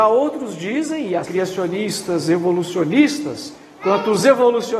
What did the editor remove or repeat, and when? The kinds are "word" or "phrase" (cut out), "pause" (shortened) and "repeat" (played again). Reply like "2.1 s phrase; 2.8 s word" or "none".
1.2 s phrase